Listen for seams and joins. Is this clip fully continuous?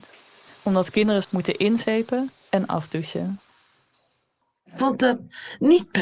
no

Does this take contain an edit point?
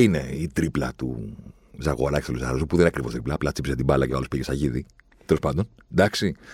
no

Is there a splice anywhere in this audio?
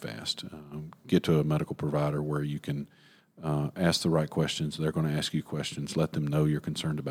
no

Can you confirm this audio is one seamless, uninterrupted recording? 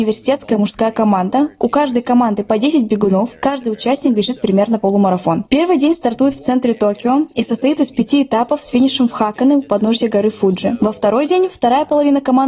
yes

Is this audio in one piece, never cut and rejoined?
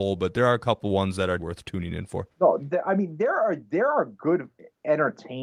no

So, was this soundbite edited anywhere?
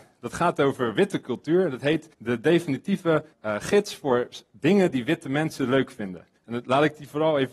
yes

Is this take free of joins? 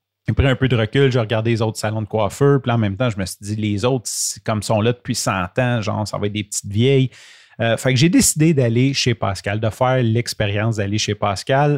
yes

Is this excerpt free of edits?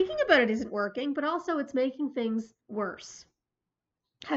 no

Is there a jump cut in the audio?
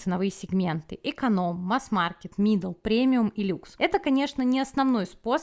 no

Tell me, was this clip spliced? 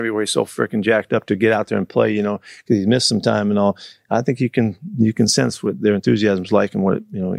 no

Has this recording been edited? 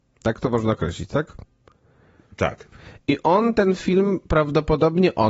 no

